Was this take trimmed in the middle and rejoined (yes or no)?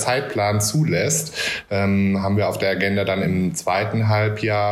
no